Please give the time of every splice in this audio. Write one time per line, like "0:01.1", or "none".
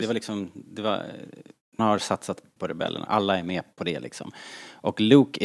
0:01.8
0:02.6
0:03.0
0:03.7